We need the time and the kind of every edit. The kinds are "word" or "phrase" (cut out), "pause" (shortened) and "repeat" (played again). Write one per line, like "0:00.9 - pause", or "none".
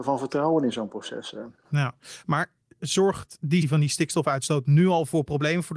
0:03.6 - word